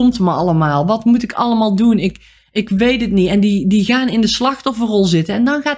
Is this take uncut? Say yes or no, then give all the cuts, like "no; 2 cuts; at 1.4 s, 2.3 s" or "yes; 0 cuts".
yes; 0 cuts